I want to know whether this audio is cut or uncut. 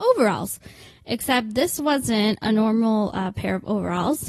uncut